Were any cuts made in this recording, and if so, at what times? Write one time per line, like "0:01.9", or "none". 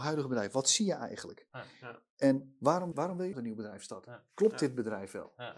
0:02.9
0:03.3